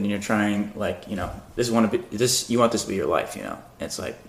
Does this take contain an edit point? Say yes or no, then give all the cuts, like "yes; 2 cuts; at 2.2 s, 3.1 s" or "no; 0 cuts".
no; 0 cuts